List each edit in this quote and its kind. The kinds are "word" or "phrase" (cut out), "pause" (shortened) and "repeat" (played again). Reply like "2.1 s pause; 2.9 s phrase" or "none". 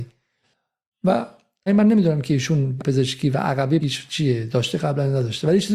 1.7 s word; 2.8 s word; 3.8 s word